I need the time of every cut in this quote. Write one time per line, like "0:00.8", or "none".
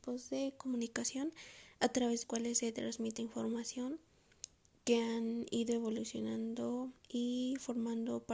0:02.2
0:03.2
0:04.5
0:07.0